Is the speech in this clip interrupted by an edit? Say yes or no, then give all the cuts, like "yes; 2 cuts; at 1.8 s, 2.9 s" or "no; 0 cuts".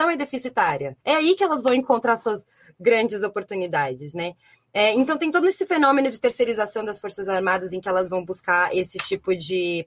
yes; 1 cut; at 1.0 s